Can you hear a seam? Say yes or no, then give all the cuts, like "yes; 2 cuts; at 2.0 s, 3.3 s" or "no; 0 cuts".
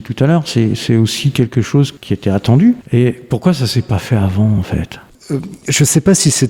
no; 0 cuts